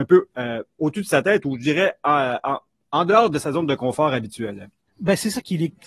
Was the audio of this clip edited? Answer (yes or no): yes